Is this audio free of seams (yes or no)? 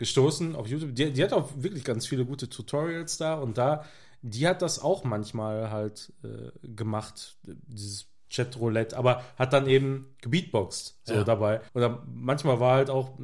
no